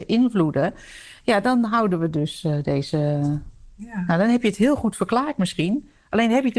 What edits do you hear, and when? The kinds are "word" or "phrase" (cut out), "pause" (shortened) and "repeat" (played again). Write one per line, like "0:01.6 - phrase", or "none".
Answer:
none

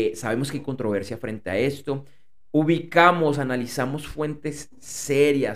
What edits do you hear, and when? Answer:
none

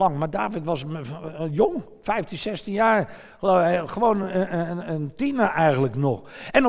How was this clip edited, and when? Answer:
none

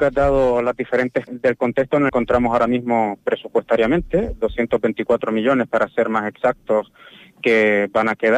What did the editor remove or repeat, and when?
0:01.3 - word
0:02.1 - phrase

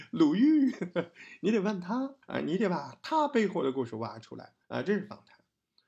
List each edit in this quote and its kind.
0:02.2 - pause
0:04.6 - pause

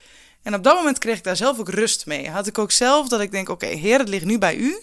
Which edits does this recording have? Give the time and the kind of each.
none

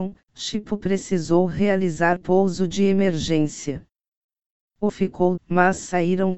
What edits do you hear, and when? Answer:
0:02.2 - word
0:04.9 - word
0:05.4 - word

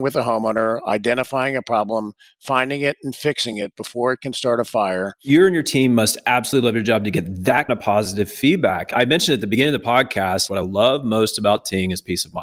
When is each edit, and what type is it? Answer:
0:07.7 - word

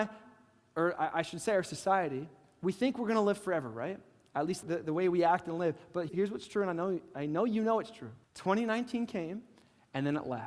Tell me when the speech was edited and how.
0:04.6 - word
0:06.1 - word
0:08.2 - pause

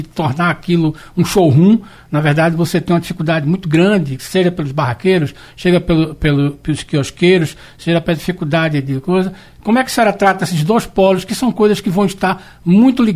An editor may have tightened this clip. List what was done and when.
none

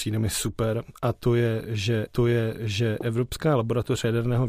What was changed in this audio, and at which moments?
0:02.1 - repeat

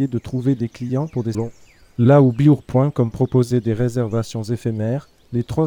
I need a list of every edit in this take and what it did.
0:01.3 - word

